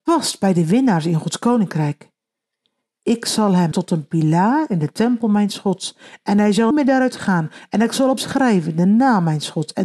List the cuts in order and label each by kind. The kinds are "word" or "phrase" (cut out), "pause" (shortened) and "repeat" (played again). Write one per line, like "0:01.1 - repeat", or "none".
0:03.7 - word
0:06.7 - word
0:08.2 - word